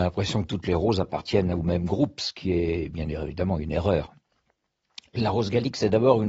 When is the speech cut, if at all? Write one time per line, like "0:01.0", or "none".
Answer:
none